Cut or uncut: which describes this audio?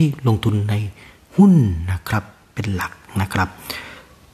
uncut